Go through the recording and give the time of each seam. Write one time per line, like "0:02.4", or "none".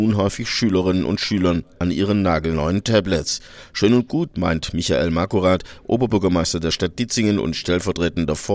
none